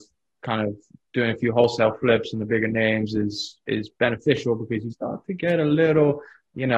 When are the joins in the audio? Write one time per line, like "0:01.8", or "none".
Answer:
0:04.9